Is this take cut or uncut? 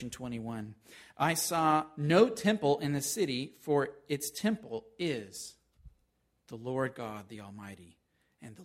uncut